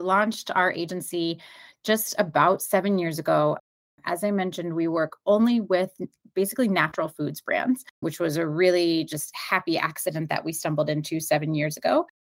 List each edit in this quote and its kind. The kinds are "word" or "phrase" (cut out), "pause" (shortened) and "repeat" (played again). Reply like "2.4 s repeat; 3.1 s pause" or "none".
7.9 s pause

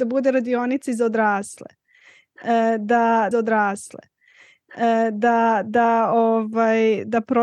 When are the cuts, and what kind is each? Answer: 3.3 s repeat

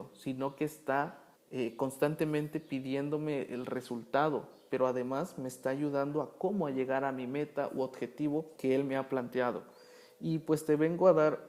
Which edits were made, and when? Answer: 1.4 s pause; 8.6 s pause

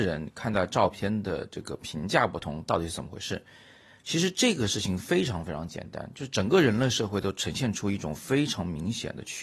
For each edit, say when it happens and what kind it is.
none

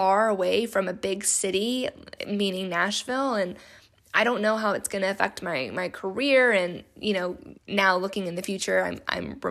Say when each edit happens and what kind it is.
7.6 s pause

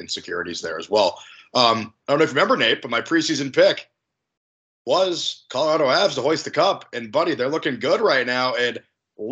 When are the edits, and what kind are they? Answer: 2.0 s pause

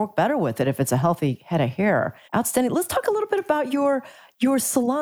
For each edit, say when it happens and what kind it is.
2.2 s pause

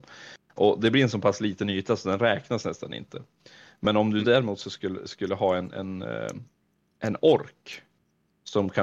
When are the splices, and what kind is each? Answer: none

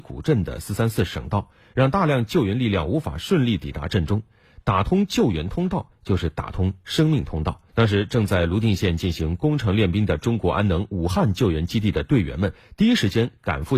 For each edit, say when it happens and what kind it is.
7.7 s pause

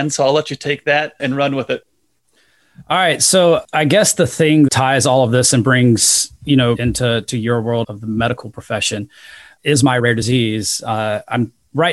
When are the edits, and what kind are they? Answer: 4.7 s phrase; 6.8 s phrase; 7.8 s word; 9.6 s word

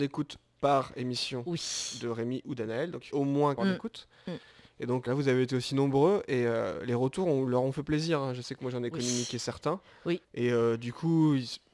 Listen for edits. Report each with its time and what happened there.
3.1 s phrase; 3.6 s phrase; 5.1 s word; 10.2 s pause

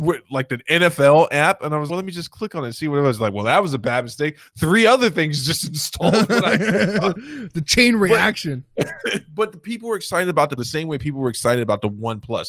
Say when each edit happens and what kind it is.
1.9 s phrase; 10.6 s word

